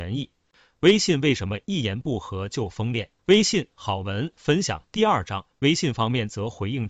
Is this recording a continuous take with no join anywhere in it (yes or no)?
no